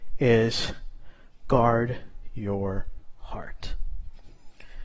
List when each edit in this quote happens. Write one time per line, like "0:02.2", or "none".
none